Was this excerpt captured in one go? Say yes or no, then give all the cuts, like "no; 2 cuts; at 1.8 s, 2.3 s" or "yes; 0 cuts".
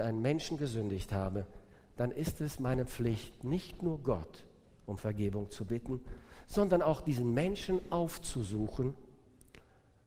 yes; 0 cuts